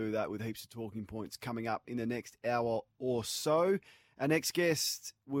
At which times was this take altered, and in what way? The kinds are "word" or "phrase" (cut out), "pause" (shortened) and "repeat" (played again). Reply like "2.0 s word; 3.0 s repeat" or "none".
none